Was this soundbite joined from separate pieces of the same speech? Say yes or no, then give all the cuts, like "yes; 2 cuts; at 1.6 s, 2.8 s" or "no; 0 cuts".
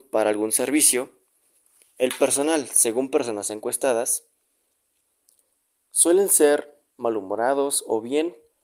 no; 0 cuts